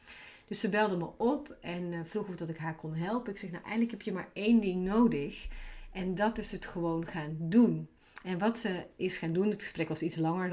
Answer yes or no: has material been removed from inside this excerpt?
no